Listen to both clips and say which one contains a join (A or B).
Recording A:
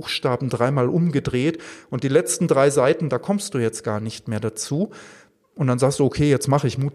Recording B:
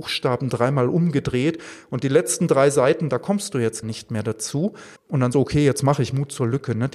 B